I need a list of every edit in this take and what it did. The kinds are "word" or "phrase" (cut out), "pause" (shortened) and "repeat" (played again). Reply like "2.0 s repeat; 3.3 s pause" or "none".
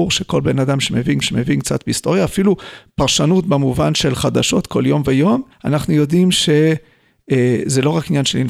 1.2 s repeat; 5.5 s pause